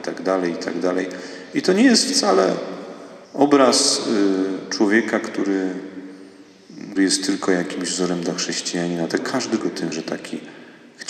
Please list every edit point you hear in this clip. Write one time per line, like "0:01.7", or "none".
0:03.2
0:07.0
0:09.2
0:09.6
0:09.9